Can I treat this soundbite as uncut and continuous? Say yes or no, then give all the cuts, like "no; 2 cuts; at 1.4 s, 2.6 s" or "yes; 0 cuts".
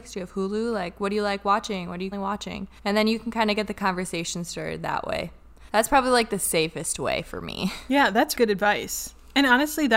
no; 4 cuts; at 2.1 s, 2.8 s, 5.7 s, 8.4 s